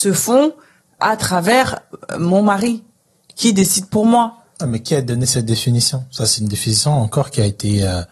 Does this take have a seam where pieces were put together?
yes; 1 cut; at 1.0 s

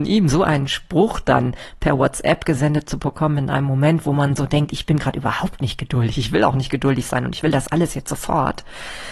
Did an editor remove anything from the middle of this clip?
no; 0 cuts

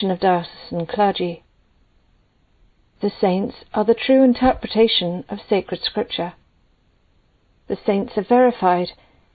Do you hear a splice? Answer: no; 0 cuts

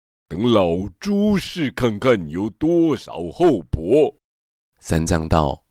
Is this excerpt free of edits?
no; 1 cut; at 4.3 s

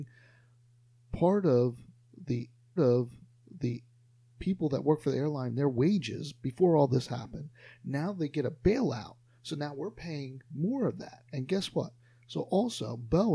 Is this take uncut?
no; 2 cuts; at 2.8 s, 11.3 s

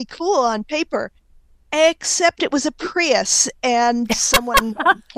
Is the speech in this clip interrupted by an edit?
no; 0 cuts

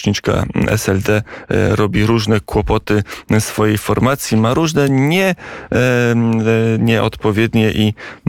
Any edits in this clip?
no; 0 cuts

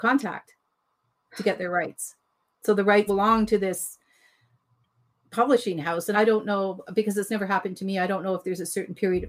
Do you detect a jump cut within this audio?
yes; 2 cuts; at 3.1 s, 6.1 s

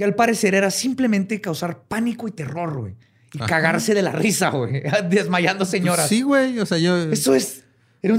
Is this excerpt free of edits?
yes; 0 cuts

